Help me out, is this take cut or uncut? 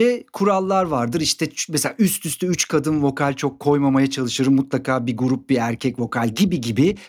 uncut